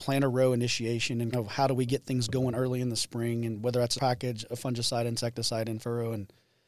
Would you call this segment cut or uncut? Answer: cut